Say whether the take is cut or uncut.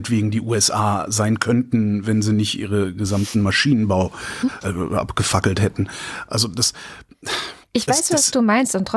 cut